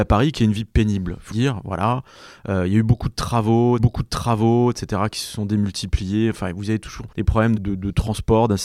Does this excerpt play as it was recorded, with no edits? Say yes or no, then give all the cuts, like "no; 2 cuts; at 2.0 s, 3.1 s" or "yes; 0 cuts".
no; 4 cuts; at 1.3 s, 3.8 s, 7.1 s, 7.6 s